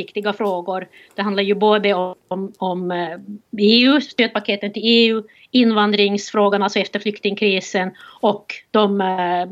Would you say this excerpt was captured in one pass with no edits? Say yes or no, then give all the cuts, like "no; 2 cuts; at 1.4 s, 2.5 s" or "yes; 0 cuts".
yes; 0 cuts